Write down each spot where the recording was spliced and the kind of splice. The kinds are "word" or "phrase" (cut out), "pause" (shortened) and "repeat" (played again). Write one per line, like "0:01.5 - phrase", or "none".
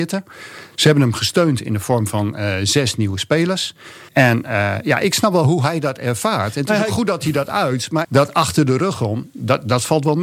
0:04.1 - pause
0:08.0 - phrase

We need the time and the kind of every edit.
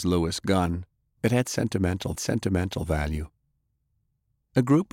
0:00.9 - pause
0:02.1 - repeat

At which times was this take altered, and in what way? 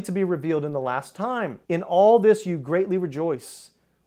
0:01.6 - pause

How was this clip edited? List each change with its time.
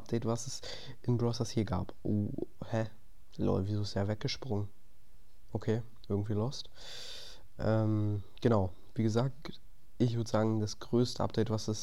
none

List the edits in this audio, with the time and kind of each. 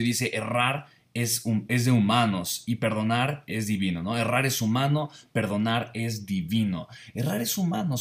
none

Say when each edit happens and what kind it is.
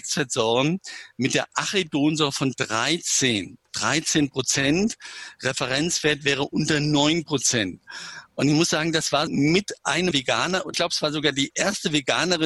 0:09.3 - word
0:10.1 - phrase
0:10.7 - word

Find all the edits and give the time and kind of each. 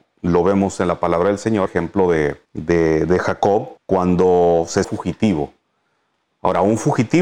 0:01.7 - word
0:02.5 - pause
0:03.8 - pause
0:04.8 - word

